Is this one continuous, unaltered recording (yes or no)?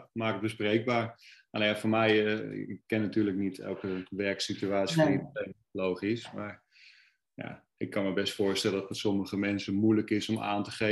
yes